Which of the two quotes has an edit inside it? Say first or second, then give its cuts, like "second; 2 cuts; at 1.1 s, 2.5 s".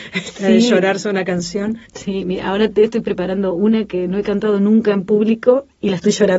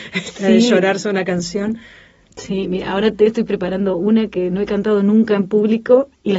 first; 1 cut; at 1.8 s